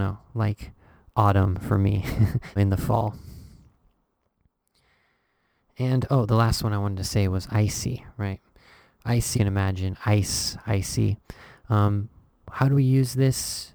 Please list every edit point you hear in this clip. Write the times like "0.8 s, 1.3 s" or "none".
2.6 s, 9.3 s